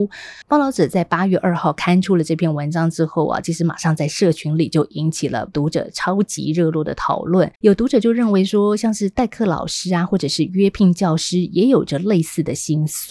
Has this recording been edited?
yes; 1 cut; at 7.6 s

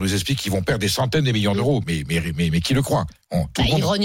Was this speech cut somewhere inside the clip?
yes; 1 cut; at 1.8 s

